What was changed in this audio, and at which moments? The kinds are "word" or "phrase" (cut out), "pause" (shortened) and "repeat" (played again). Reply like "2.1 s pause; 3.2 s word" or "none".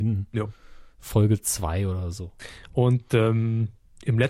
none